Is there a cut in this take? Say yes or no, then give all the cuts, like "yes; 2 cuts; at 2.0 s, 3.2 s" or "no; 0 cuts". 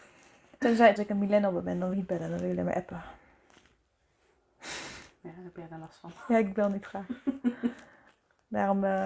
yes; 2 cuts; at 1.0 s, 1.9 s